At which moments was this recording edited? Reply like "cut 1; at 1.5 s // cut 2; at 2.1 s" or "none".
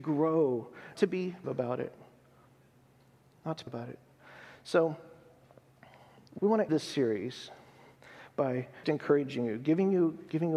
cut 1; at 1.0 s // cut 2; at 1.4 s // cut 3; at 3.7 s // cut 4; at 6.4 s // cut 5; at 6.7 s // cut 6; at 8.8 s